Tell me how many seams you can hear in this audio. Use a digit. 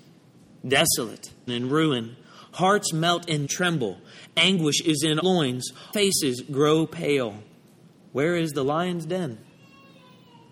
4